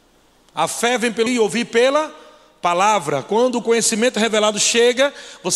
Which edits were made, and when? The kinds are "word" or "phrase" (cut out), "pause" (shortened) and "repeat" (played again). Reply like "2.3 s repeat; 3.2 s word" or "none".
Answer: 1.3 s word